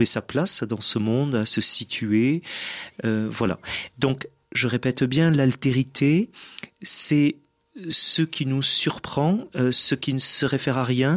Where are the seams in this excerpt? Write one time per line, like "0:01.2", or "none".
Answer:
none